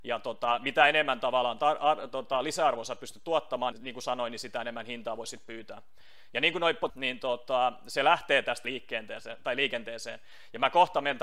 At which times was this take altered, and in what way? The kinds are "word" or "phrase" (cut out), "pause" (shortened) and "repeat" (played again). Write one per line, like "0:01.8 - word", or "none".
0:03.7 - word
0:06.9 - phrase
0:08.6 - word